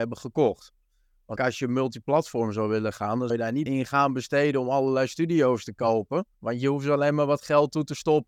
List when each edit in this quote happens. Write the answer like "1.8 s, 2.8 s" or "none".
1.4 s, 3.3 s, 3.7 s, 6.3 s

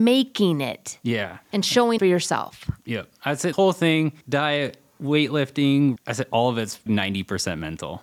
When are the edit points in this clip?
1.4 s, 2.0 s, 3.5 s, 4.2 s, 6.0 s, 6.9 s

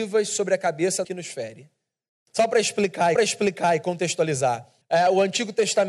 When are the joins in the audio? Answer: 1.0 s, 2.1 s, 3.2 s, 4.8 s

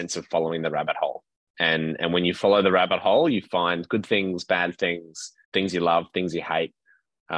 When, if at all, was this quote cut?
5.4 s

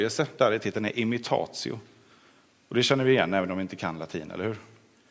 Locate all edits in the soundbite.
none

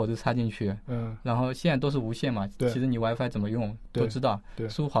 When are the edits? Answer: none

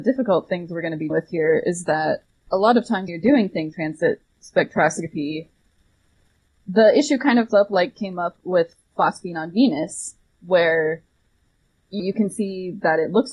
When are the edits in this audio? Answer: 1.1 s, 3.1 s, 3.7 s, 7.5 s, 12.0 s

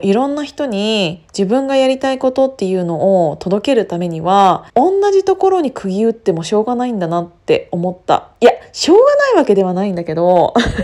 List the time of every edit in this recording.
4.7 s

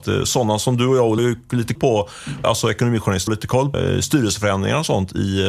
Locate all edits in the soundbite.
1.2 s, 1.8 s, 2.4 s, 3.3 s, 3.7 s

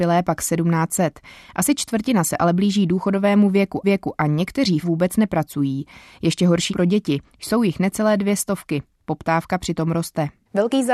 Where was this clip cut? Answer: 3.8 s, 4.8 s, 6.7 s

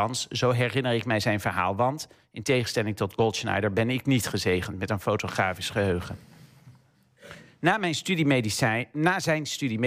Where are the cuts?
none

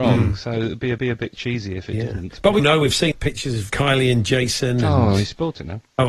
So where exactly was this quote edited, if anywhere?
1.0 s, 2.6 s, 3.1 s, 3.7 s

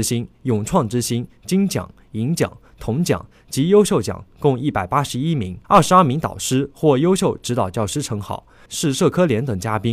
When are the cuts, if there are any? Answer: 5.6 s, 8.7 s

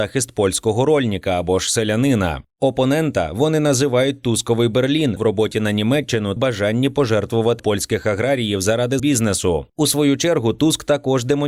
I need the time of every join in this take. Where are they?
5.2 s, 6.4 s, 7.6 s, 9.0 s

